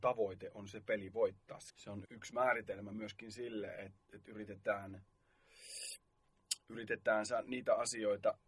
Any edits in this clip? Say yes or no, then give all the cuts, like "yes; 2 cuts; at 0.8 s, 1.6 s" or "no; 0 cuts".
yes; 3 cuts; at 1.7 s, 2.0 s, 4.0 s